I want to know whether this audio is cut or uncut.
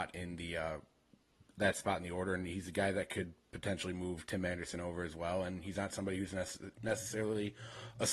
uncut